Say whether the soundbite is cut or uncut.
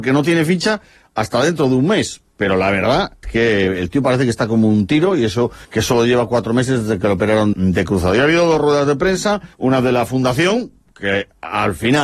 cut